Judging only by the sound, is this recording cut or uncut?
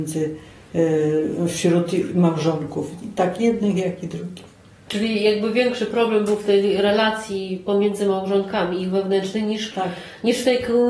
uncut